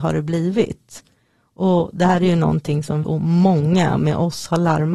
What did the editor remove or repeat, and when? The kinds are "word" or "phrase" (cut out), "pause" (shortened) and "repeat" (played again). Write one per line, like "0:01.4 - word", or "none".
0:03.0 - word